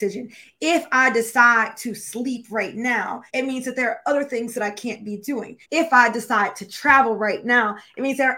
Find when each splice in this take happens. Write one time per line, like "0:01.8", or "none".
0:03.3
0:05.6